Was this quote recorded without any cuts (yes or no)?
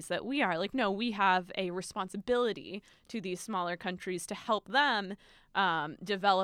yes